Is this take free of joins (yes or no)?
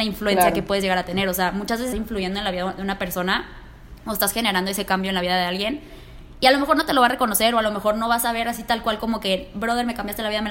no